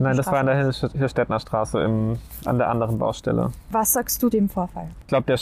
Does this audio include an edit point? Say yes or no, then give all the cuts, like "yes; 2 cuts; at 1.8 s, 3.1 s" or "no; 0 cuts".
yes; 1 cut; at 4.3 s